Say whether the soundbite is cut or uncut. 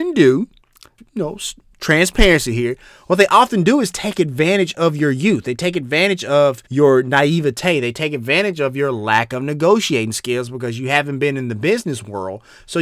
cut